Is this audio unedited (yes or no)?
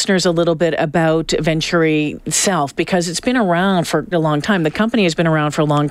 no